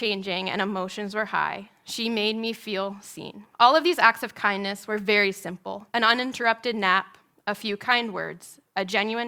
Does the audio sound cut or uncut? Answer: cut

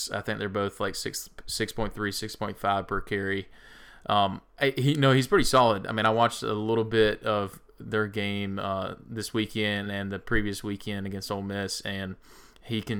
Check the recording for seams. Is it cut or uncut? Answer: uncut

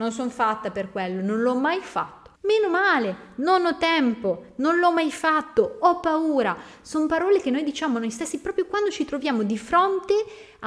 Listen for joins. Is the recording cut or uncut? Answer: cut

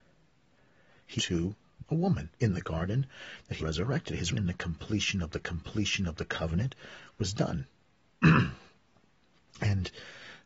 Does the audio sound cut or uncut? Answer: cut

